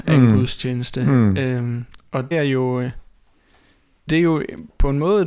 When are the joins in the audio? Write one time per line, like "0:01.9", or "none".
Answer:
0:02.3
0:04.1